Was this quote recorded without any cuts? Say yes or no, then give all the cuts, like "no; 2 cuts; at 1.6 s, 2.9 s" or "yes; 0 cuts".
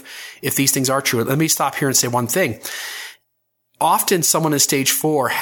yes; 0 cuts